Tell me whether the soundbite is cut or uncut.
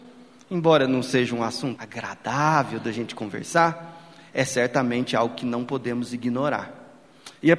cut